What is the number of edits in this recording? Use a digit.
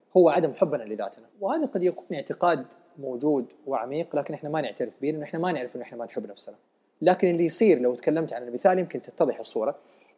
2